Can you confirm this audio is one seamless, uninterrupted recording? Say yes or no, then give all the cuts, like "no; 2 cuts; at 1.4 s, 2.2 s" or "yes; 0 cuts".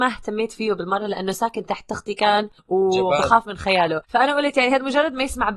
no; 2 cuts; at 2.6 s, 4.0 s